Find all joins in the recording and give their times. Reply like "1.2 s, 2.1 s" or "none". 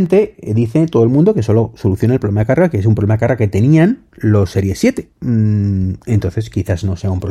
4.1 s, 5.1 s